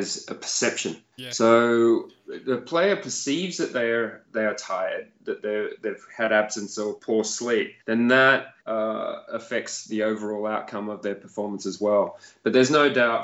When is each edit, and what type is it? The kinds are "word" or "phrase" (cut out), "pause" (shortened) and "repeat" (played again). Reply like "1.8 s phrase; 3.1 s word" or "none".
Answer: 1.1 s pause; 7.0 s word; 7.8 s pause; 8.6 s pause